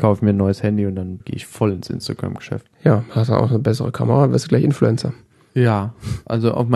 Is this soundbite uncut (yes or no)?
no